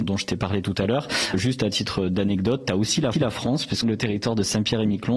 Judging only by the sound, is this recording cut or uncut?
cut